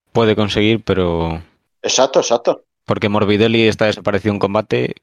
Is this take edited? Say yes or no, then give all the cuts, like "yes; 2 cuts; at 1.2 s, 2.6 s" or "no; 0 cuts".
no; 0 cuts